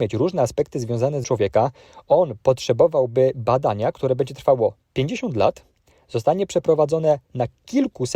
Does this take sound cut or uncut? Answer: cut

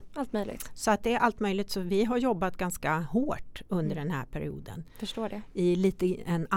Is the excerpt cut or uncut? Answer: uncut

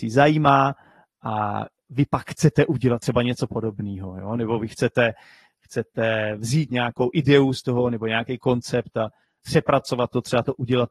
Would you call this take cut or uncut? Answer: uncut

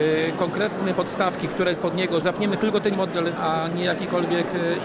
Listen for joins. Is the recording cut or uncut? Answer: cut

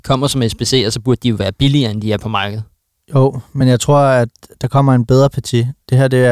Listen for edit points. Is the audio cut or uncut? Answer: uncut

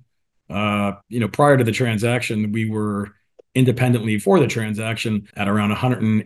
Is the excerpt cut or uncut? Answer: cut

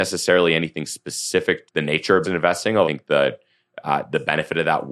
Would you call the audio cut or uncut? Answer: cut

